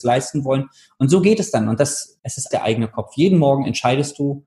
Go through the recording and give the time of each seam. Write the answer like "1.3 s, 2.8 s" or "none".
2.2 s, 2.5 s